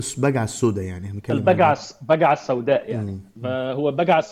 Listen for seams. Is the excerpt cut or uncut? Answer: uncut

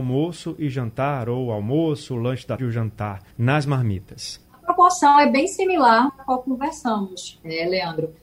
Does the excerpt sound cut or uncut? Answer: cut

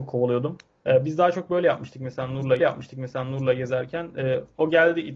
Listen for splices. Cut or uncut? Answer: cut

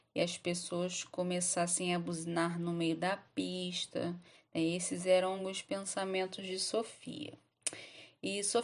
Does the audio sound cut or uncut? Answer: uncut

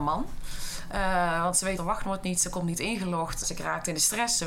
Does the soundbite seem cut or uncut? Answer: cut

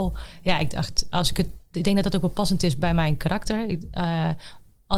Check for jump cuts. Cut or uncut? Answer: uncut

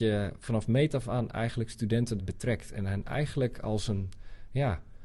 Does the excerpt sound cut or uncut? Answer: cut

